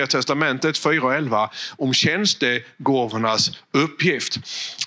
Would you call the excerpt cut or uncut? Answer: uncut